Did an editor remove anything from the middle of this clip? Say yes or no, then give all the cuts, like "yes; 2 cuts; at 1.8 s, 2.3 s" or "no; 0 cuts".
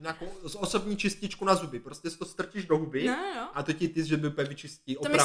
no; 0 cuts